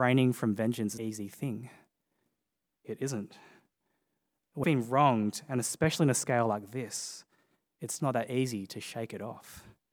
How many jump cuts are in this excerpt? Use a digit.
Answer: 3